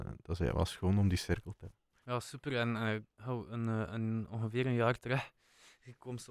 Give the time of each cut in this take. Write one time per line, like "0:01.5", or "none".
0:02.0